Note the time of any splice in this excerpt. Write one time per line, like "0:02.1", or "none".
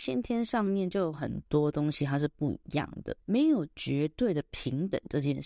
0:03.2